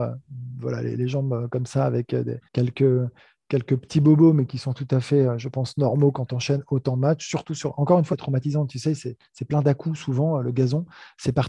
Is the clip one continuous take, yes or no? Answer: no